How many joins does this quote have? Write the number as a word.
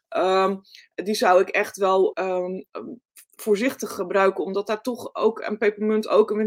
one